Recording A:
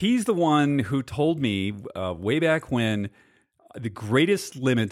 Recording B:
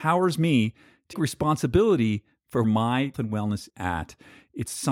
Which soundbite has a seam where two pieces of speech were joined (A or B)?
B